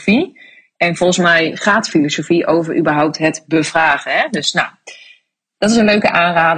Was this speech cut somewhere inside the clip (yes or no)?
no